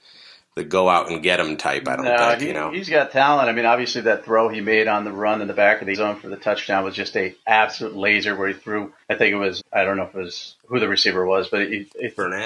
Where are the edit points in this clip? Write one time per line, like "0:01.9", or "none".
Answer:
0:05.9
0:09.0
0:09.6
0:10.6